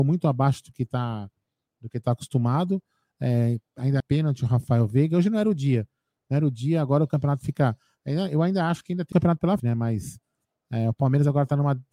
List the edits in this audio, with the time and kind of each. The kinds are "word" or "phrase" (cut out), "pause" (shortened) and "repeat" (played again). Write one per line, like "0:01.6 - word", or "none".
0:04.0 - word
0:09.1 - word
0:09.6 - word